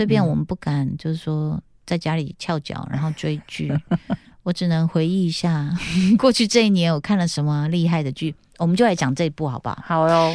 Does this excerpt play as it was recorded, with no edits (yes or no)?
yes